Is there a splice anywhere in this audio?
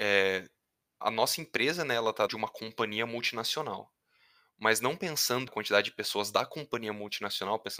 yes; 3 cuts; at 1.0 s, 2.3 s, 5.5 s

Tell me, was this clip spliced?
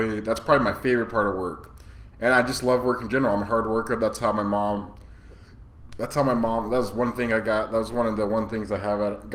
no; 0 cuts

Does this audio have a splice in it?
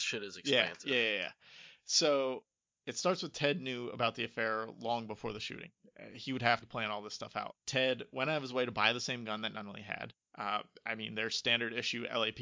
yes; 4 cuts; at 2.6 s, 6.6 s, 7.6 s, 10.2 s

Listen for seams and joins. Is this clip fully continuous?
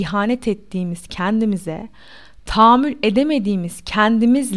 yes; 0 cuts

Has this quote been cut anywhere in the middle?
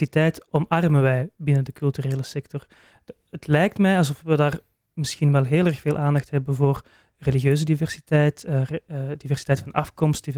no; 0 cuts

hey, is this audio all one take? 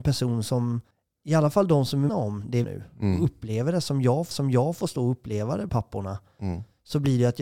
no; 5 cuts; at 0.9 s, 2.1 s, 2.6 s, 4.3 s, 5.7 s

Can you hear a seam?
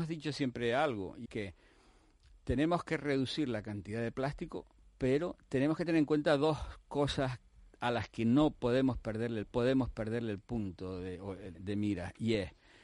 yes; 4 cuts; at 1.3 s, 4.8 s, 9.4 s, 11.5 s

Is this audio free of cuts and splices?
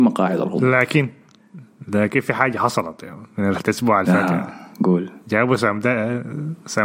no; 1 cut; at 4.7 s

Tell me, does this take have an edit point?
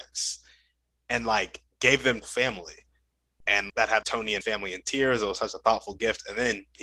yes; 4 cuts; at 2.2 s, 3.7 s, 4.0 s, 4.4 s

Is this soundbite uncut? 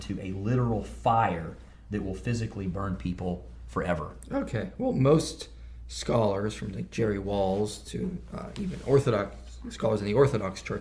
yes; 0 cuts

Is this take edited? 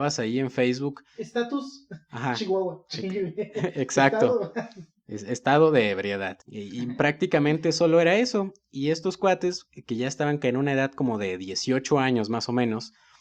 yes; 1 cut; at 6.4 s

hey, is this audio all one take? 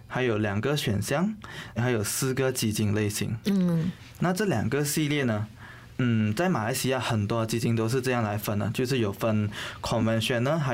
no; 1 cut; at 1.8 s

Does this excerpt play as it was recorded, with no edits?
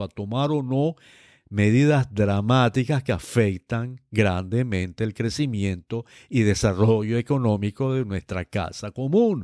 yes; 0 cuts

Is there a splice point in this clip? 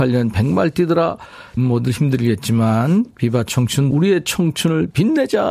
yes; 2 cuts; at 1.6 s, 3.9 s

